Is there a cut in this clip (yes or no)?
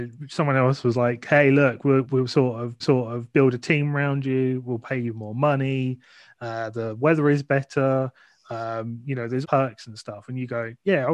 yes